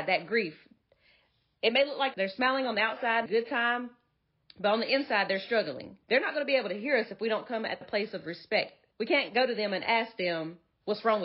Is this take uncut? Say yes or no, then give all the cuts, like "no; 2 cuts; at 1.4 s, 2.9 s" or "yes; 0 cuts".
no; 5 cuts; at 2.1 s, 3.3 s, 6.0 s, 7.8 s, 8.9 s